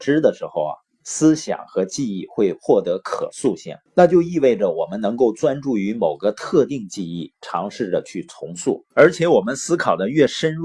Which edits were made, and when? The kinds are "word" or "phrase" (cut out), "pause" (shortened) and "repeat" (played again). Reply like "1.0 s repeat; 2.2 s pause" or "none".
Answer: 3.9 s pause; 8.9 s pause